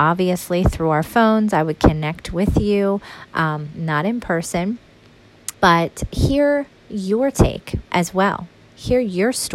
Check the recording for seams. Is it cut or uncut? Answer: cut